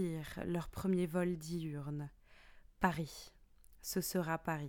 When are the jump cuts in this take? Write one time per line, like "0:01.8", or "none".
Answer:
none